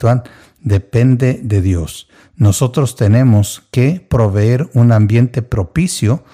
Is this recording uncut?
yes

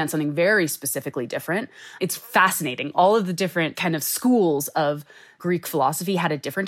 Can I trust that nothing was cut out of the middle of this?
yes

